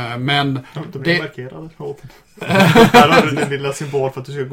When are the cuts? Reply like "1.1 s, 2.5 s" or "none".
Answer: none